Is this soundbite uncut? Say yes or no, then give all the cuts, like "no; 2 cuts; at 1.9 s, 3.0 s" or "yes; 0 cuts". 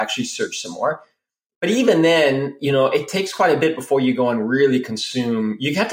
yes; 0 cuts